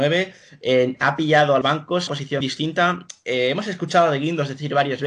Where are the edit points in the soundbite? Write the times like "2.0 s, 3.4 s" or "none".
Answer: 1.6 s, 2.1 s, 2.4 s

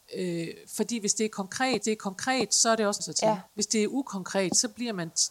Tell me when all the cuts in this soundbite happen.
1.8 s, 3.0 s, 3.5 s

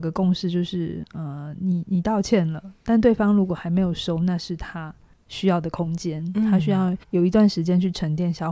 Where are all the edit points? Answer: 5.1 s, 7.0 s

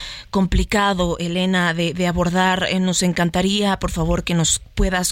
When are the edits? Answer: none

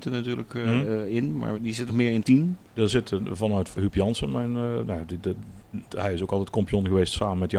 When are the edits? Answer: 1.6 s, 1.9 s, 2.2 s, 3.8 s

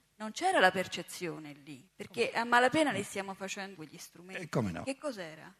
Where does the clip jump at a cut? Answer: 1.9 s, 3.7 s

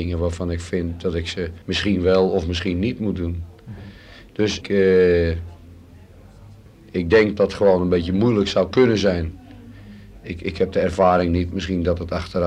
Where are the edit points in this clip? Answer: 1.6 s, 4.6 s, 6.7 s, 7.4 s

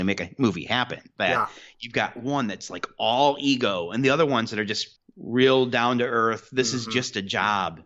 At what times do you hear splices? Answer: 5.0 s

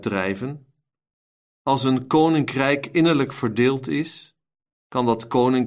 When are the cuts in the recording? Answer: none

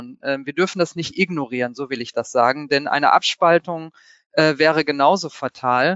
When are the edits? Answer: none

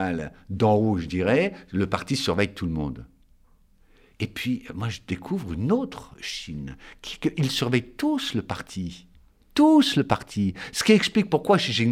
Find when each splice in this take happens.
none

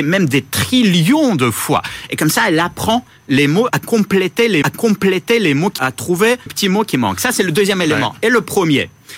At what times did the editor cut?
3.7 s, 4.6 s, 5.8 s, 6.5 s

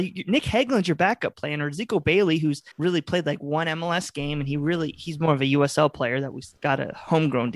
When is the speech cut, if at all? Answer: 2.7 s

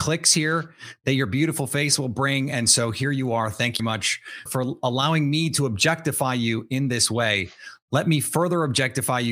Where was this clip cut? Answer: 3.8 s, 4.5 s

